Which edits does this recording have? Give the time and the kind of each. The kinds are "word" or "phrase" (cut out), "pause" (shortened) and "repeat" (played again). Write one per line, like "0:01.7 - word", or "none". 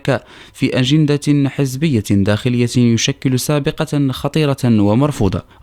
none